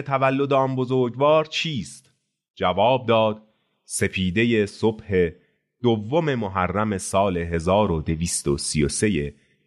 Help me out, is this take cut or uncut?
uncut